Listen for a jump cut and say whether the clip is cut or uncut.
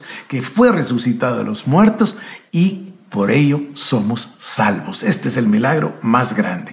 uncut